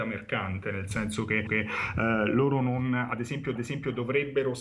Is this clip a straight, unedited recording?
no; 2 cuts; at 1.5 s, 3.6 s

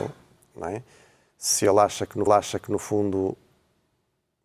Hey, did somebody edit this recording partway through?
yes; 1 cut; at 2.3 s

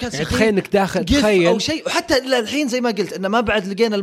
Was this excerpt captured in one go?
yes; 0 cuts

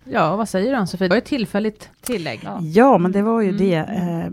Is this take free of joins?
no; 2 cuts; at 1.1 s, 1.9 s

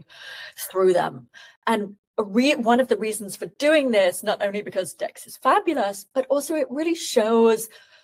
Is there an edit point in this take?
no; 0 cuts

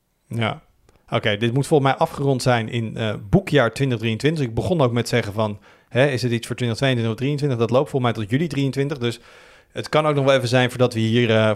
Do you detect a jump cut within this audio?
no; 0 cuts

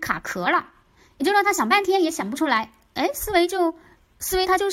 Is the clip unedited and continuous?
yes; 0 cuts

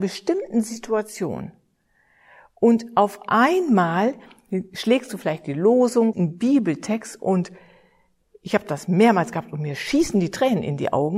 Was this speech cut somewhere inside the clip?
yes; 1 cut; at 6.1 s

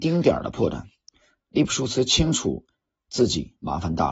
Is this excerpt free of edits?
yes; 0 cuts

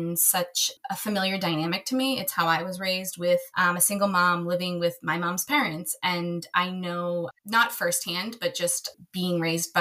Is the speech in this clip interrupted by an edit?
no; 0 cuts

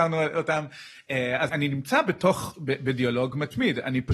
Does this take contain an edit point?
yes; 1 cut; at 1.5 s

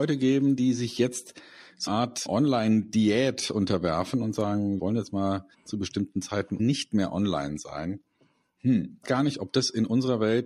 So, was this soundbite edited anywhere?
yes; 6 cuts; at 1.9 s, 2.3 s, 4.8 s, 5.5 s, 6.6 s, 9.0 s

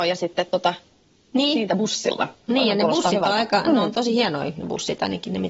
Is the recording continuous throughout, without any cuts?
yes; 0 cuts

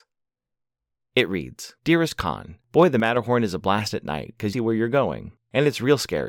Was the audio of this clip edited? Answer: yes; 2 cuts; at 1.8 s, 4.5 s

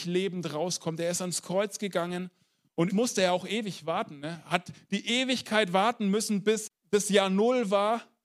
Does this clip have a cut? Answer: yes; 2 cuts; at 2.9 s, 6.7 s

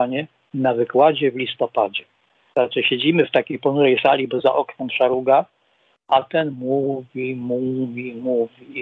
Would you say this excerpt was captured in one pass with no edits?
yes; 0 cuts

